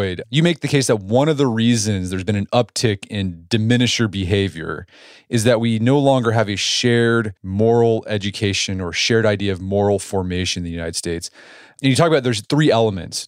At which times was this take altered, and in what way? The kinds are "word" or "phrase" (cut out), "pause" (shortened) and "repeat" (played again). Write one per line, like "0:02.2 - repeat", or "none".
0:07.4 - pause